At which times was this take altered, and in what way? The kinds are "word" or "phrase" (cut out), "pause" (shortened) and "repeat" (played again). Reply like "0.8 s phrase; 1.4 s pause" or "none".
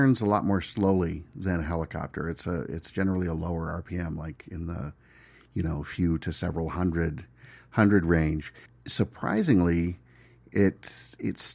none